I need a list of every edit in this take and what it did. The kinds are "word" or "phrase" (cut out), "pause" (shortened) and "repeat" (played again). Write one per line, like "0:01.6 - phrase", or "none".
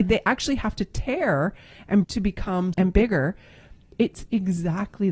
0:02.0 - word
0:02.7 - word